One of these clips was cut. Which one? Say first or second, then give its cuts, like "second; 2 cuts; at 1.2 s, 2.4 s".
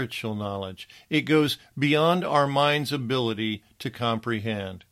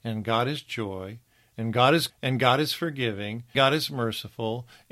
second; 2 cuts; at 2.1 s, 3.5 s